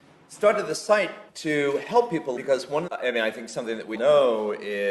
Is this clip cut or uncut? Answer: cut